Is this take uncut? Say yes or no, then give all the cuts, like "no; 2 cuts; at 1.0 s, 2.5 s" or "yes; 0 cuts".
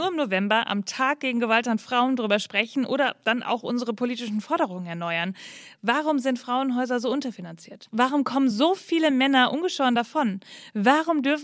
yes; 0 cuts